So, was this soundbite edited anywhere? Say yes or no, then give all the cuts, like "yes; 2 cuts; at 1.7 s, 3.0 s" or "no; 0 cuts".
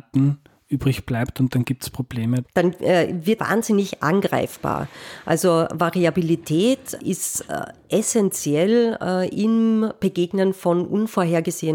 yes; 3 cuts; at 2.4 s, 3.4 s, 7.0 s